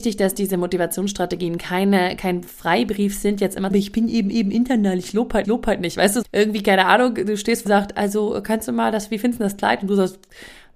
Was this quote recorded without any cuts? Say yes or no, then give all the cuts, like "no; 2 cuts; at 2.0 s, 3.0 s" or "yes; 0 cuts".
no; 5 cuts; at 3.7 s, 4.3 s, 5.4 s, 6.2 s, 7.7 s